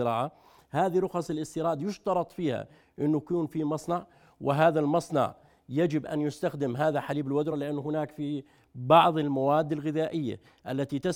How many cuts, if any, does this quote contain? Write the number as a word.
zero